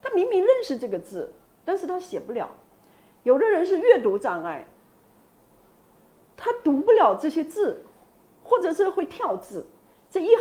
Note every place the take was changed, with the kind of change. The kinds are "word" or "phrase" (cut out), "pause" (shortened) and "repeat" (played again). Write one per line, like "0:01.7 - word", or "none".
none

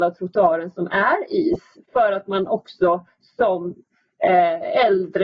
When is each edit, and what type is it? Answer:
none

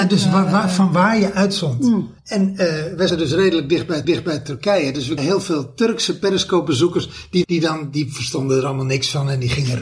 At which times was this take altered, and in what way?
0:02.2 - pause
0:03.1 - word
0:04.0 - repeat
0:05.2 - word
0:07.4 - word

